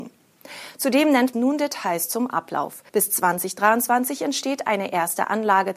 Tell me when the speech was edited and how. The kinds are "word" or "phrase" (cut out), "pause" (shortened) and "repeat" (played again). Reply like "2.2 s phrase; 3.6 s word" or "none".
1.3 s word; 2.9 s pause